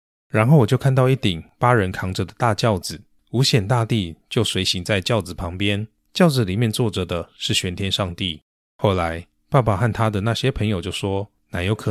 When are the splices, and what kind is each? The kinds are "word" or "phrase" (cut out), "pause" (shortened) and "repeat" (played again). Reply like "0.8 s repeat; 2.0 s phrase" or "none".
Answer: none